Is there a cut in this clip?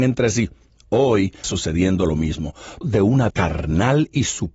yes; 3 cuts; at 1.4 s, 2.8 s, 3.3 s

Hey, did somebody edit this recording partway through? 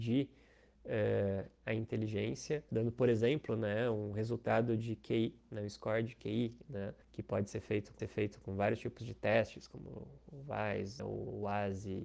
yes; 4 cuts; at 2.7 s, 7.0 s, 8.0 s, 11.0 s

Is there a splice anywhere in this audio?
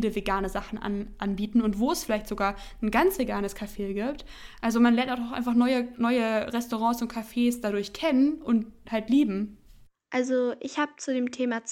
no; 0 cuts

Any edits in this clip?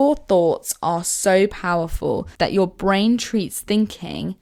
yes; 1 cut; at 2.4 s

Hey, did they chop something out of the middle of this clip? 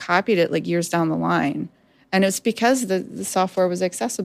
no; 0 cuts

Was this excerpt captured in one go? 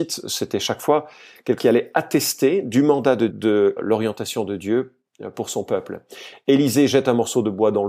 no; 3 cuts; at 1.6 s, 3.3 s, 3.8 s

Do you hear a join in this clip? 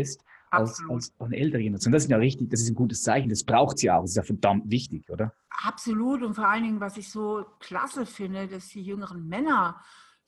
no; 0 cuts

